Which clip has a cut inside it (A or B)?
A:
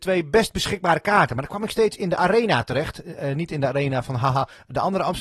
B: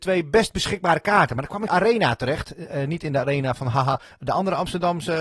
B